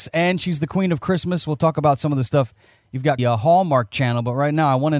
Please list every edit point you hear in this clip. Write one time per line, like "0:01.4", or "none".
0:03.2

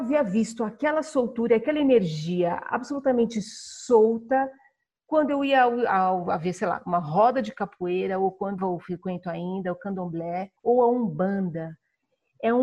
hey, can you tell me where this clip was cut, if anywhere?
0:08.6
0:10.6

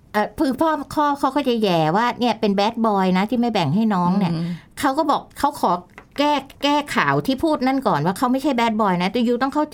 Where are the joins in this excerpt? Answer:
0:05.3
0:06.5

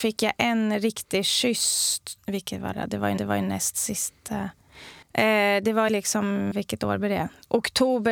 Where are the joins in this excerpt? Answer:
0:02.2
0:02.7
0:03.2
0:05.0
0:05.9
0:06.5

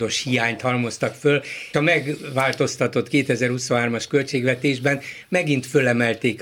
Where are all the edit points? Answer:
0:01.7

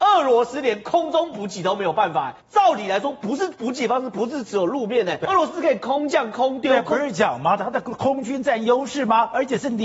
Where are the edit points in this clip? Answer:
0:02.4
0:05.3

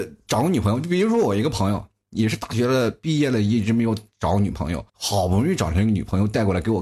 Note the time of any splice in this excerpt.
0:04.9

